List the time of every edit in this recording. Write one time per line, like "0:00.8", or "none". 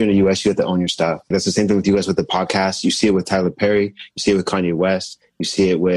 0:01.3